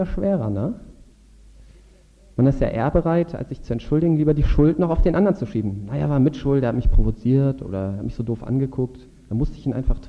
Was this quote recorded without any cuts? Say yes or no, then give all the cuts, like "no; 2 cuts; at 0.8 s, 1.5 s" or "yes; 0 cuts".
yes; 0 cuts